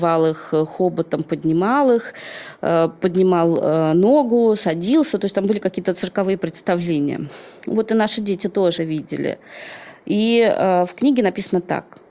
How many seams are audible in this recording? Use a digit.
1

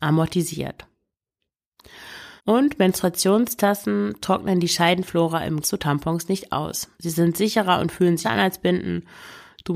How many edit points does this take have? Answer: 4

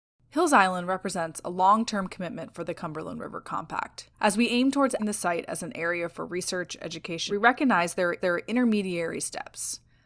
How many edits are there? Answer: 4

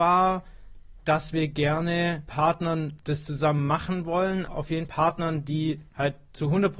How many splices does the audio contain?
6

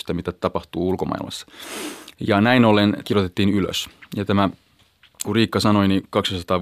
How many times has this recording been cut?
2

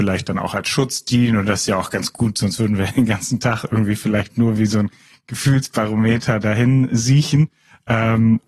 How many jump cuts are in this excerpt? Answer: 0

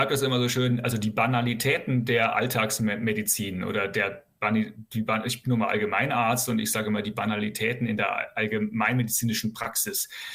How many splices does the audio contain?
0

